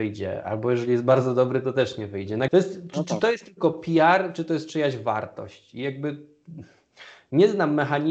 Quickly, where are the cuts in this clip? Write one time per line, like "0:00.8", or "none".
0:02.5